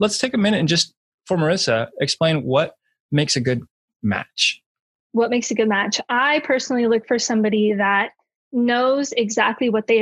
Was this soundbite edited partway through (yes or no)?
no